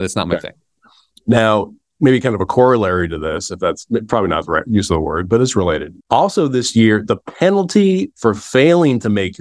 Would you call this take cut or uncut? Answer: cut